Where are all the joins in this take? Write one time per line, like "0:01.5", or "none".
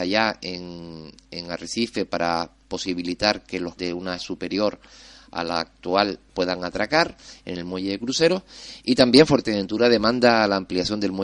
0:03.8
0:04.2
0:06.3